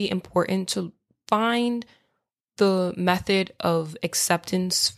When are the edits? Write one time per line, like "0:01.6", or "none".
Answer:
none